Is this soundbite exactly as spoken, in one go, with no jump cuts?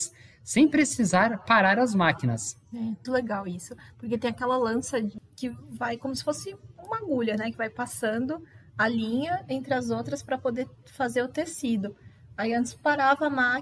no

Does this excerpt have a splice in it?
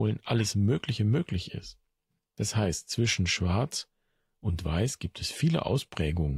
no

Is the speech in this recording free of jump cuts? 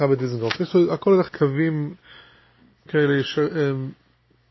no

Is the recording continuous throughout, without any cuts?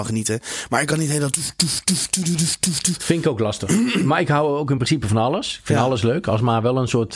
yes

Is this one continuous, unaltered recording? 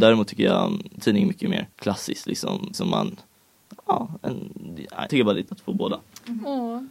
no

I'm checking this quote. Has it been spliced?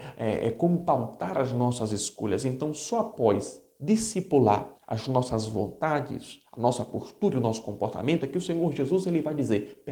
yes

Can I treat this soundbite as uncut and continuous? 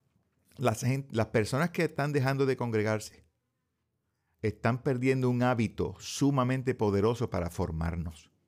yes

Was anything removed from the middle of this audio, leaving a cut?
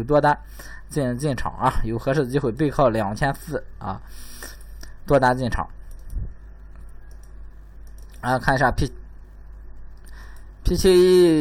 yes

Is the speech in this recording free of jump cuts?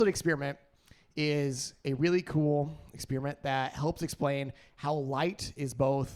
yes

